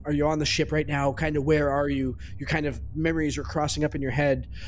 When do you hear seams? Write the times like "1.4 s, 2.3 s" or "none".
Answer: none